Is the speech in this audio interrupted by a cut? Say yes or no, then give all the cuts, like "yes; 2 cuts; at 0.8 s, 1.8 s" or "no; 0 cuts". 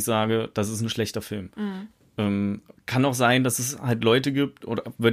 no; 0 cuts